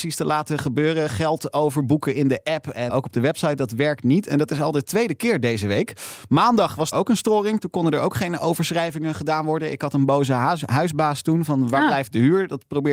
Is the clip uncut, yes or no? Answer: no